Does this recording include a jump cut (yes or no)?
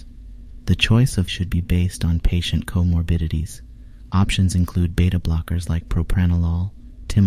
yes